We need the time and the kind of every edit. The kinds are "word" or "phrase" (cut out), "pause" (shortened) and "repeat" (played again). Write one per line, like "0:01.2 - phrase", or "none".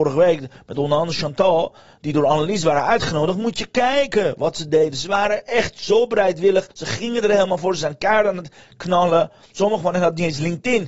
0:06.7 - pause